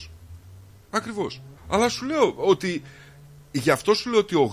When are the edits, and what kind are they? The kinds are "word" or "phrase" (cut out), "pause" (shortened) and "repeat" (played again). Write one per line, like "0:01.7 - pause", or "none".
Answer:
0:01.6 - pause